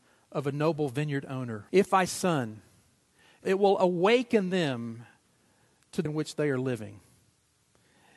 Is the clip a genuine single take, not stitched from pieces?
no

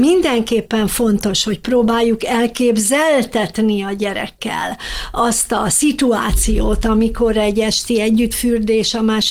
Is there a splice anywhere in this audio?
no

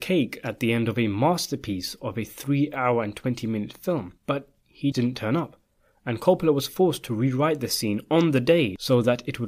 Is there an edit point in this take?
yes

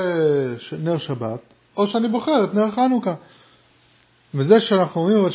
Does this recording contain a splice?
no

